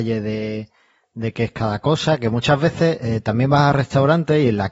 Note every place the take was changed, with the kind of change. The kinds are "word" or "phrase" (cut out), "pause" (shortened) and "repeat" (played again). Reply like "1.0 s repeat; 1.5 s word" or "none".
none